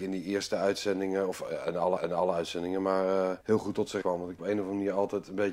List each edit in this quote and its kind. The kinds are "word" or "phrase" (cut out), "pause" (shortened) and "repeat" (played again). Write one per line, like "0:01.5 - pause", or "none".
0:02.0 - repeat
0:03.4 - pause
0:04.0 - word
0:04.4 - phrase